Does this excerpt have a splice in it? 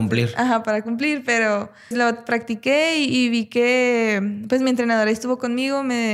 yes; 1 cut; at 1.9 s

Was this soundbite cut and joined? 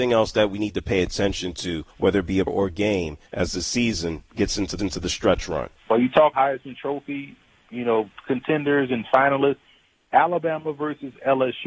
yes; 6 cuts; at 1.9 s, 2.5 s, 3.3 s, 4.8 s, 5.8 s, 6.3 s

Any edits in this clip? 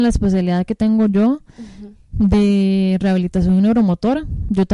no; 0 cuts

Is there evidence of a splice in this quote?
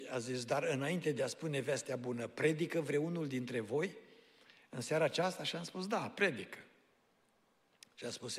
no; 0 cuts

